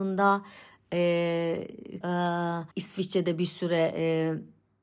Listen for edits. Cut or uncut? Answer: cut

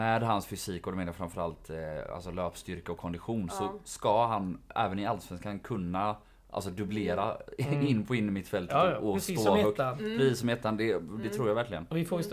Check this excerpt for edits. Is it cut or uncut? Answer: uncut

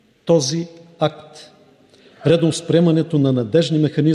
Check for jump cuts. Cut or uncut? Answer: uncut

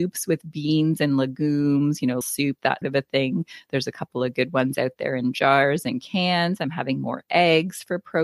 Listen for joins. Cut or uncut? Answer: cut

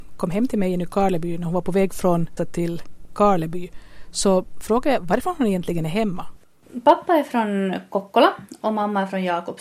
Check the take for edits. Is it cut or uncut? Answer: cut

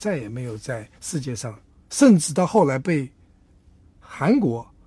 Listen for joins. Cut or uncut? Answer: cut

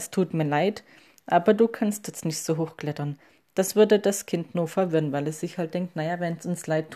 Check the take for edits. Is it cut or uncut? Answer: uncut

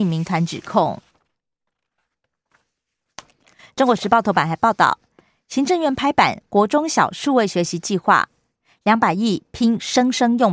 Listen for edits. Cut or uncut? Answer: uncut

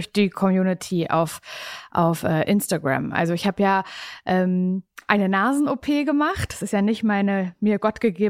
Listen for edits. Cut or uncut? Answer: uncut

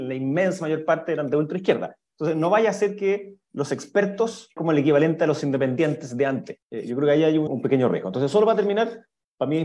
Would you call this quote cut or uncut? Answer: cut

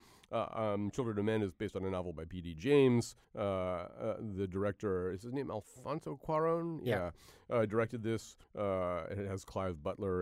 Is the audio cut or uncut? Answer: cut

